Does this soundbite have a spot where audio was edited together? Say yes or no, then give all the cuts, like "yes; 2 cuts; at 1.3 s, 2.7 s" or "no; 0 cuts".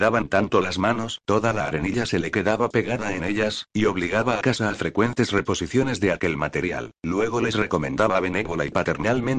yes; 3 cuts; at 1.2 s, 4.4 s, 7.0 s